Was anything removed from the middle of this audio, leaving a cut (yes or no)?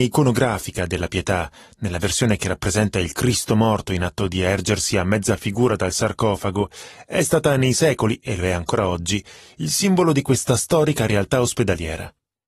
no